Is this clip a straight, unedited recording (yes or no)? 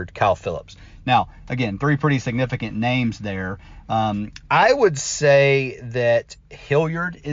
yes